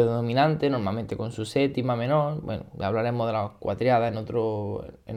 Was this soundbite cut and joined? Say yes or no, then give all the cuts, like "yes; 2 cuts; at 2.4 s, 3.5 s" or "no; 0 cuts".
no; 0 cuts